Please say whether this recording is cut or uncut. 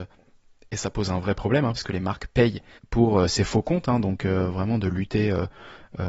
uncut